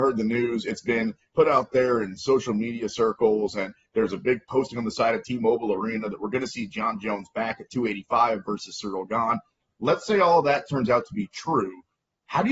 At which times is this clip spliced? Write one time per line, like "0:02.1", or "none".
none